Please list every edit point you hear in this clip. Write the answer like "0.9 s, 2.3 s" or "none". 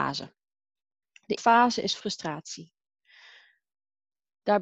1.4 s